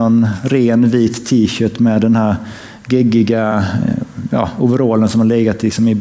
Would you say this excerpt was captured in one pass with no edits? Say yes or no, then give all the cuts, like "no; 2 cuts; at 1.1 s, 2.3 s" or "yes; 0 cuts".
yes; 0 cuts